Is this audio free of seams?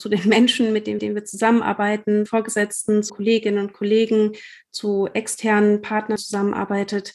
no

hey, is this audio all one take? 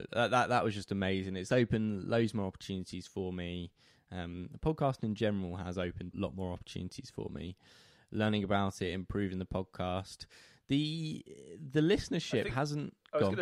no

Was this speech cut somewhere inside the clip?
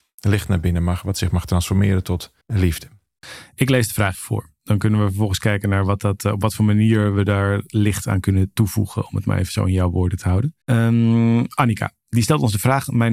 yes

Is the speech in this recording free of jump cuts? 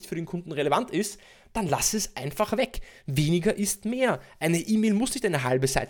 yes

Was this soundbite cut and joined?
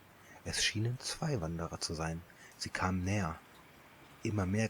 no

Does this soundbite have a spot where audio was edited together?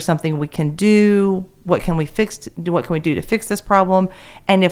no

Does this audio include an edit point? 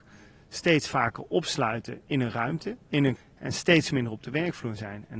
yes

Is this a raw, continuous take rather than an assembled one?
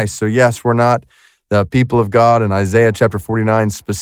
yes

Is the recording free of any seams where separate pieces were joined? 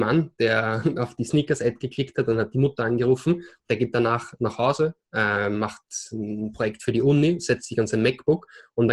yes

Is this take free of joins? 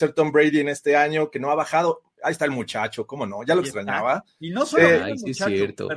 yes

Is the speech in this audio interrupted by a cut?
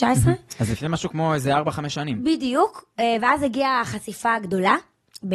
no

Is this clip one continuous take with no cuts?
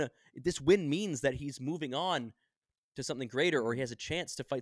yes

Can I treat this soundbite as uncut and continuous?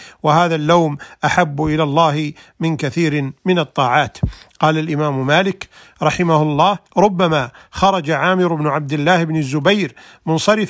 no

